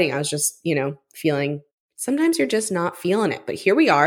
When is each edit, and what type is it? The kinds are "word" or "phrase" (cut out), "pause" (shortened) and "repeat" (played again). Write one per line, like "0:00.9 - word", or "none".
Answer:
0:01.7 - pause

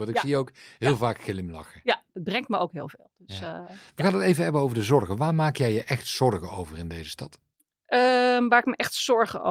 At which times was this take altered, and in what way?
none

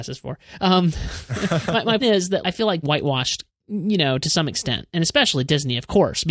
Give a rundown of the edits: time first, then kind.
0:02.0 - word
0:02.4 - word
0:02.8 - word
0:03.5 - phrase

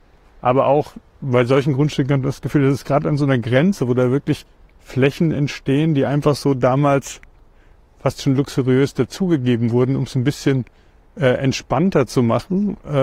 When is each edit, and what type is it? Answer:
none

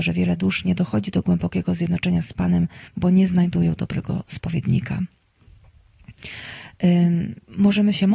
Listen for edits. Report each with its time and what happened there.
0:02.9 - pause

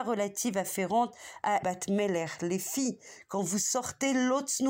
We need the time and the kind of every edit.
0:01.6 - word

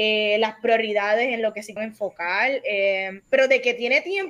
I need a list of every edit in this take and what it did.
0:01.8 - word
0:03.2 - pause

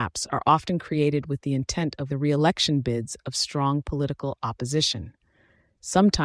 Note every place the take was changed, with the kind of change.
0:02.1 - word

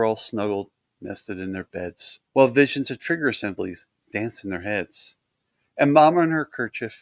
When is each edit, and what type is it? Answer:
0:02.3 - pause

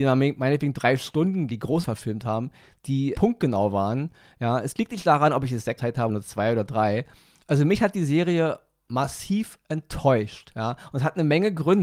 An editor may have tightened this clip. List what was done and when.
0:01.5 - word
0:01.8 - word
0:03.1 - word
0:05.8 - word
0:06.1 - word

